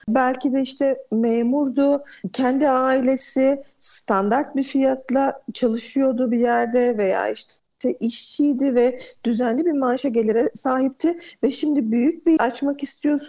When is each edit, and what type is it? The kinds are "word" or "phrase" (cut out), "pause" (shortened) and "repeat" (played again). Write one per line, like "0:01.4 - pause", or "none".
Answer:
0:12.4 - word